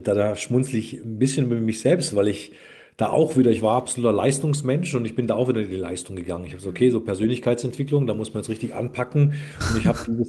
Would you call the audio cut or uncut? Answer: uncut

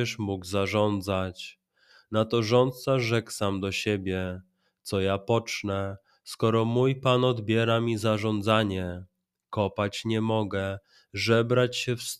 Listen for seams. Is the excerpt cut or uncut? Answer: uncut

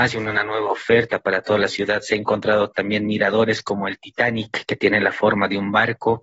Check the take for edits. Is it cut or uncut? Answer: uncut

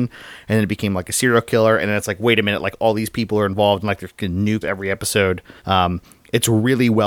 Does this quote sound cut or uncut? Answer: cut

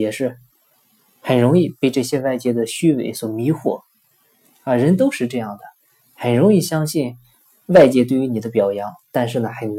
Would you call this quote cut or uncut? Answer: uncut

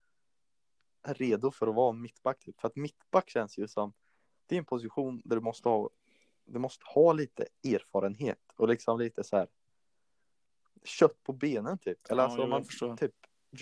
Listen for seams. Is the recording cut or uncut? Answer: uncut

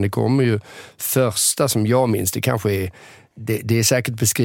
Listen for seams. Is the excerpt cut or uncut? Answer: cut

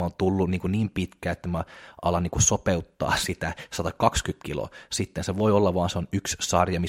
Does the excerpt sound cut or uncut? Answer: uncut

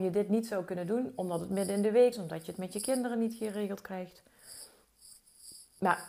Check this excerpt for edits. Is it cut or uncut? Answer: cut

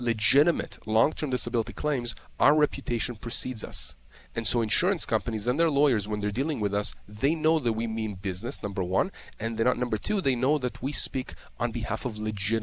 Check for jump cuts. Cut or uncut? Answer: uncut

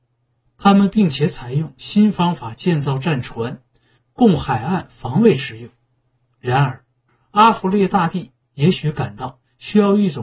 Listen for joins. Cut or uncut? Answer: uncut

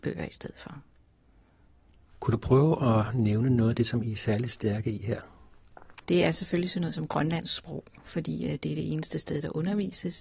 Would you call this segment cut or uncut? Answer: cut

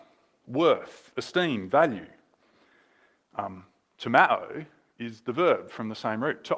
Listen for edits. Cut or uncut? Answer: uncut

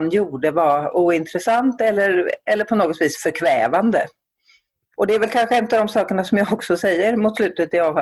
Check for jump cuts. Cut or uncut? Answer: uncut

